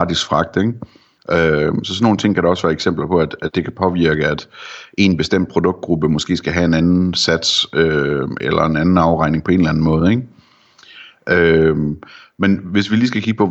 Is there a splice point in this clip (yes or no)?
no